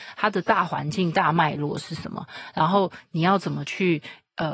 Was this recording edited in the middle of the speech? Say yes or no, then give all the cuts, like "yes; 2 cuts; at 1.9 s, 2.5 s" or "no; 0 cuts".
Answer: no; 0 cuts